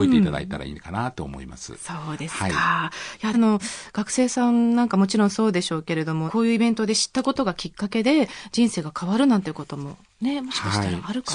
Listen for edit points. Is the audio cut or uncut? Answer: cut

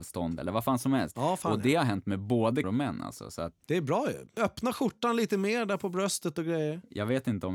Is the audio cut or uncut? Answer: cut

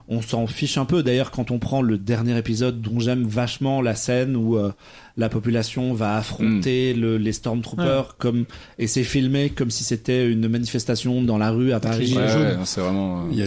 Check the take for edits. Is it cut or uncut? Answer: uncut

